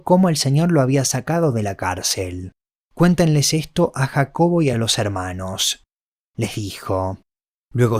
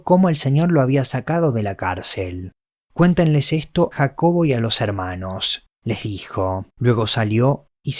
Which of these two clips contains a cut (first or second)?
second